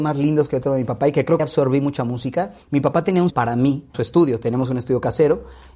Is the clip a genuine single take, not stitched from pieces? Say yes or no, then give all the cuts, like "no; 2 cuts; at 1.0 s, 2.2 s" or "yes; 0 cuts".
no; 4 cuts; at 1.4 s, 2.6 s, 3.3 s, 3.9 s